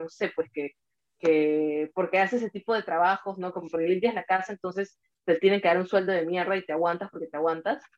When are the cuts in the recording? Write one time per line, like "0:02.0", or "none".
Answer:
none